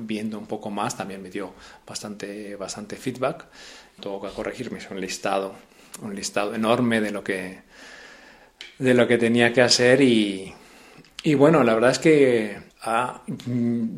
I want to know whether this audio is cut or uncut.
cut